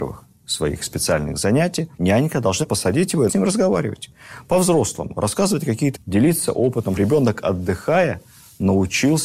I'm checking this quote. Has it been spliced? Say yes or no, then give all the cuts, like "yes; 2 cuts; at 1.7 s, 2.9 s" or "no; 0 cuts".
yes; 4 cuts; at 2.0 s, 3.3 s, 6.0 s, 7.0 s